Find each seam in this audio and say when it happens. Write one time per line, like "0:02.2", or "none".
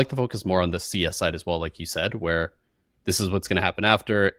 none